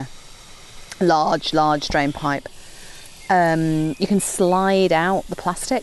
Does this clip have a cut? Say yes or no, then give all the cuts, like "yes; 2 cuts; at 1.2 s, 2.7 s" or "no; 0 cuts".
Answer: no; 0 cuts